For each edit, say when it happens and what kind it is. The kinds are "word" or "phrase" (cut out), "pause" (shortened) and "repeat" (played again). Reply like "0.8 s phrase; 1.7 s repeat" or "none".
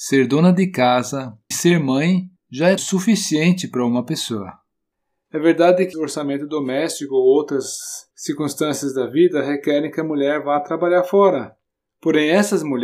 1.5 s word; 2.4 s pause; 2.8 s word; 4.9 s pause; 5.9 s phrase; 8.1 s pause